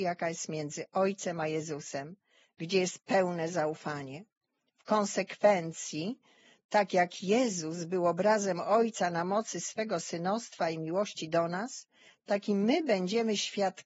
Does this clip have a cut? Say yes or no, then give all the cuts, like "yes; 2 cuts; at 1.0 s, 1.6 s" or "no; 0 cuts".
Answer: no; 0 cuts